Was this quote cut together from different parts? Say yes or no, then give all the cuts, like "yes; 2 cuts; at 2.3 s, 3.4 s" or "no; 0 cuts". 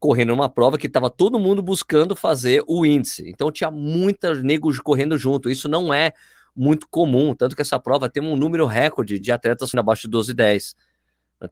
yes; 2 cuts; at 9.2 s, 9.7 s